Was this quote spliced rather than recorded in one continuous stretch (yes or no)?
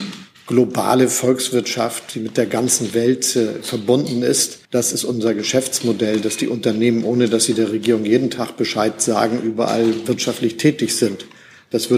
yes